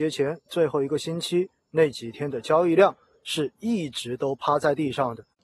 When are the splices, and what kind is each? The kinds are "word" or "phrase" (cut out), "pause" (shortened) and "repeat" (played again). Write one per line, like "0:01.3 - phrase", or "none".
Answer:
none

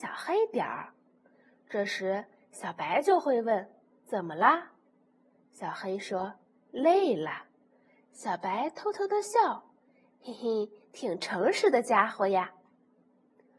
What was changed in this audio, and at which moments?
none

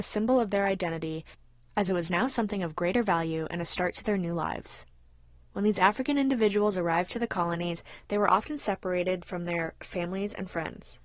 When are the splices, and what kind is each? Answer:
none

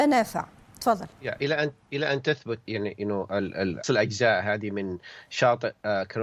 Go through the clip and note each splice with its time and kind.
0:02.7 - word
0:03.8 - phrase

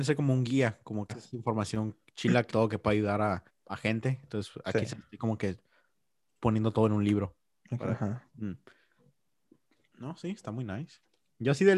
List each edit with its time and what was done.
0:01.1 - word
0:02.5 - phrase
0:03.5 - pause
0:08.3 - pause

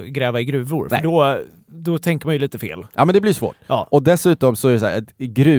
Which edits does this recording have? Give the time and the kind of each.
none

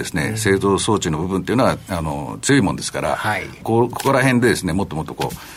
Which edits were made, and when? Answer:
0:03.6 - phrase

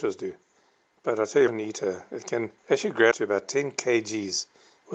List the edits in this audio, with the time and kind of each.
0:01.5 - word
0:02.6 - pause
0:03.1 - word

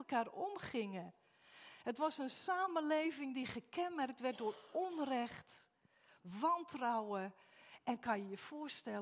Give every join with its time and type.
none

